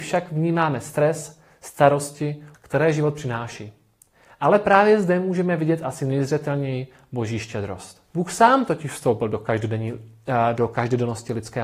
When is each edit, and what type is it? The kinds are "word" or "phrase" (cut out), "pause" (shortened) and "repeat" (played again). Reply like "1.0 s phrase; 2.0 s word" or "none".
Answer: 2.5 s phrase; 8.1 s pause